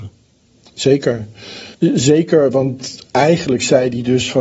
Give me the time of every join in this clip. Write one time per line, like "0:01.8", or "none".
0:01.7